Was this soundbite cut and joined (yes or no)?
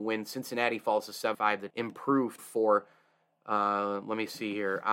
yes